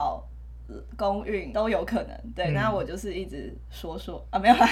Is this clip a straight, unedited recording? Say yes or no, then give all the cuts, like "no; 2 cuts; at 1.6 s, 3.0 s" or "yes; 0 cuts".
no; 1 cut; at 1.5 s